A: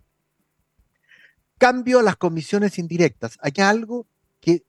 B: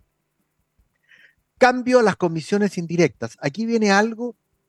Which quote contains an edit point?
A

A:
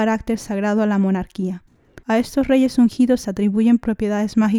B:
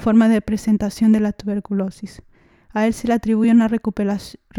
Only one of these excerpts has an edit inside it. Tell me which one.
A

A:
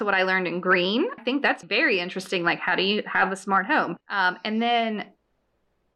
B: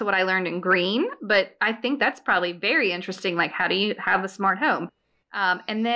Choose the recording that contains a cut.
A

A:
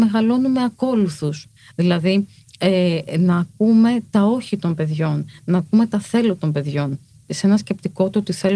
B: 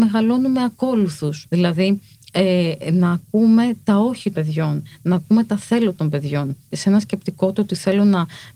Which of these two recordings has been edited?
B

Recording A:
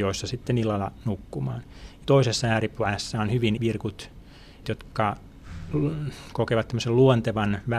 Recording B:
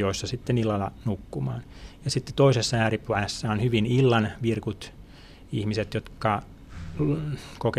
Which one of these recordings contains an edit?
A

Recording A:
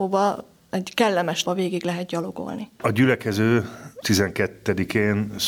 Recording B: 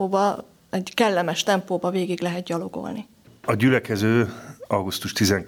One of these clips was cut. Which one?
A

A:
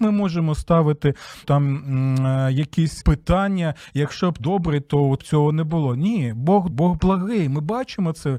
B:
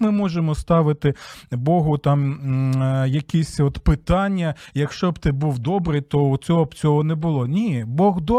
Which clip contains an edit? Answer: A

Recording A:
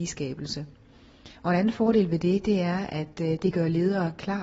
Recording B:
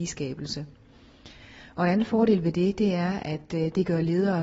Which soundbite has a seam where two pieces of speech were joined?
A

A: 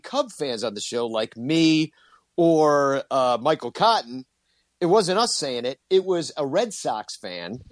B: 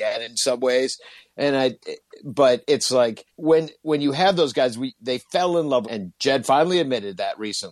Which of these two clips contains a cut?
B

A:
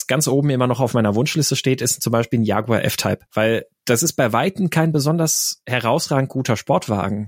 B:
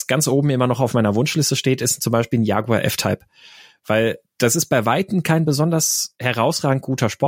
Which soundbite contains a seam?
A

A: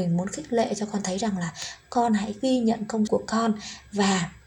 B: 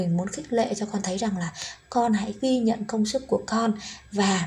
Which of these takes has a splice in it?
A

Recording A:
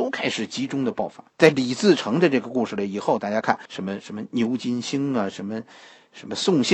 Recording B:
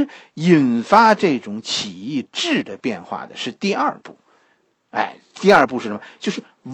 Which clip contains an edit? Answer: A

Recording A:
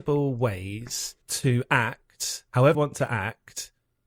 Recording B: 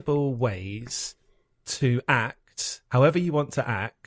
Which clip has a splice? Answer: A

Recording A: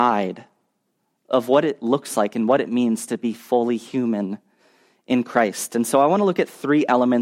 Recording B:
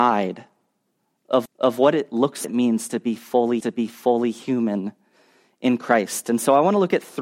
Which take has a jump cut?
B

